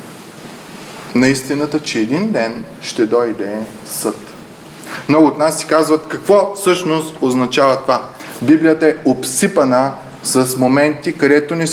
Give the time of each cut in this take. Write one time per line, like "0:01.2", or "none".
none